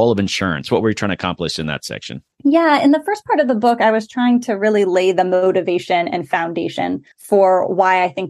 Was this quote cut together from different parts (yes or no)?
yes